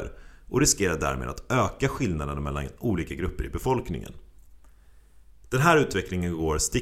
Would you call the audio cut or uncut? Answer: uncut